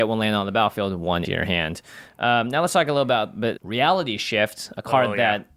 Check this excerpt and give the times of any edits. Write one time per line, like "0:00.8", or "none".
0:01.2
0:03.6